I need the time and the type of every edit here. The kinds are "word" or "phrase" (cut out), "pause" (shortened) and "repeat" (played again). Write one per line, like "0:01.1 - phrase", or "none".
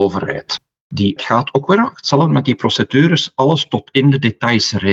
0:01.2 - word